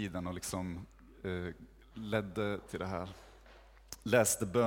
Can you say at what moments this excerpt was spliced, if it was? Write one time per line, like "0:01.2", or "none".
0:02.7

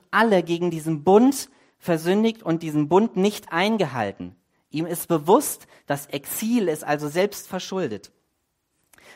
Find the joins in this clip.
none

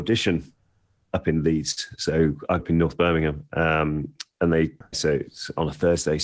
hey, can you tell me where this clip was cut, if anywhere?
0:02.6
0:04.9

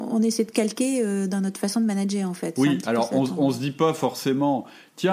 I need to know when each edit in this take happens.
none

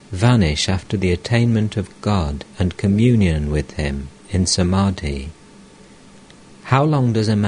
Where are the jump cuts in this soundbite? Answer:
none

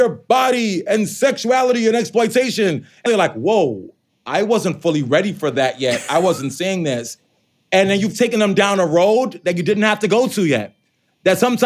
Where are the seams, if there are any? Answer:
0:03.1

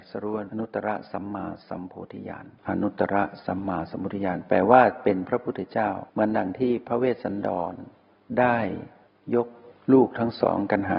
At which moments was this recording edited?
0:02.6
0:06.1

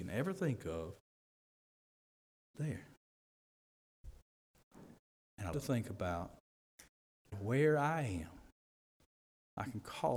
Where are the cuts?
0:02.5
0:05.5
0:07.3

